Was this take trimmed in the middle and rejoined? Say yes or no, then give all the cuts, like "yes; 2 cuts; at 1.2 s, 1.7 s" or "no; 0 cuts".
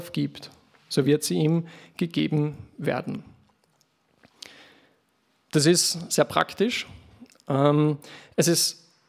no; 0 cuts